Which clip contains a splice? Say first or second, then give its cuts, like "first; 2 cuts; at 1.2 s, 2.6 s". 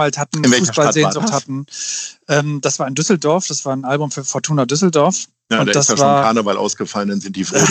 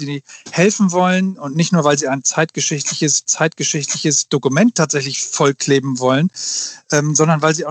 second; 2 cuts; at 1.4 s, 3.3 s